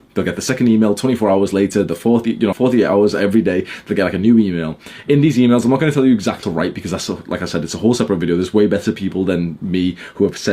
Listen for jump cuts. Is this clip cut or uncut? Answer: cut